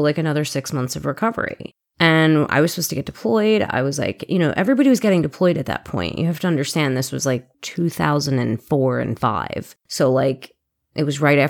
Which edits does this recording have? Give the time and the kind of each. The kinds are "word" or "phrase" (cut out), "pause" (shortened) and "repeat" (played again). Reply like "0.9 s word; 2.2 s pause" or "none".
1.9 s pause; 7.5 s pause; 9.8 s pause